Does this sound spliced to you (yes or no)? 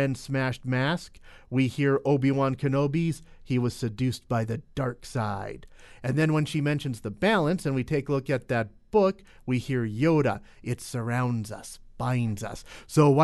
no